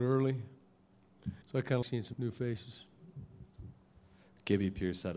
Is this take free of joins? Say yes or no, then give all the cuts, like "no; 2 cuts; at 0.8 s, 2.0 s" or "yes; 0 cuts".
no; 3 cuts; at 1.4 s, 1.8 s, 2.1 s